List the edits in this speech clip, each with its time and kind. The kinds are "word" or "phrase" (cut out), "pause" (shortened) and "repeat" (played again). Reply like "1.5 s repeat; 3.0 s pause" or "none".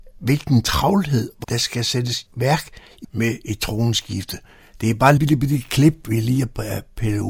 1.4 s word; 2.3 s word; 3.0 s word; 5.2 s word